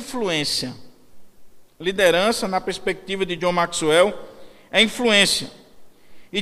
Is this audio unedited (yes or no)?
yes